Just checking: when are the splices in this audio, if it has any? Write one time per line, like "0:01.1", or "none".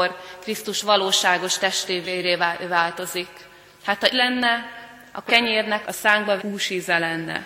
0:02.0
0:04.1
0:05.3
0:05.8
0:06.4